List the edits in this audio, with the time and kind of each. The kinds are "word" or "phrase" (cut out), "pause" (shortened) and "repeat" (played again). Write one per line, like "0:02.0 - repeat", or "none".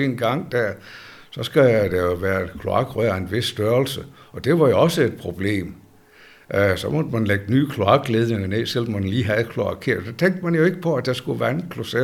none